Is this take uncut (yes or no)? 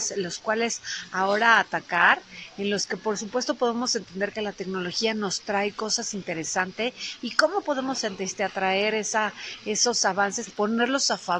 no